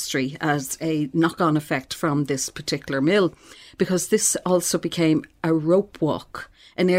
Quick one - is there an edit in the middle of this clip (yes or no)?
no